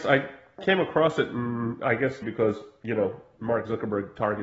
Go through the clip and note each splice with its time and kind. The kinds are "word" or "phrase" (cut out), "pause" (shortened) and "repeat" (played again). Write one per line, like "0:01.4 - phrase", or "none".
0:02.2 - word